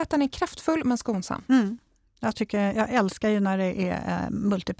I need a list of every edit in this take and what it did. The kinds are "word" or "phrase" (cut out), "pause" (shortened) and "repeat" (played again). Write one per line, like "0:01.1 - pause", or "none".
none